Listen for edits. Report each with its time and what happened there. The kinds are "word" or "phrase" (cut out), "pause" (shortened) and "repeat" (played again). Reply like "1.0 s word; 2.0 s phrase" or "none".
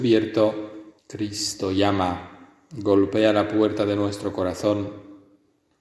1.0 s pause